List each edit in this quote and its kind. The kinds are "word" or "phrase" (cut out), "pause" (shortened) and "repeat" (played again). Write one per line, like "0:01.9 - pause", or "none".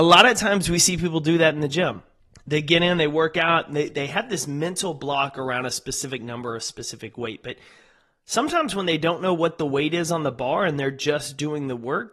0:02.2 - pause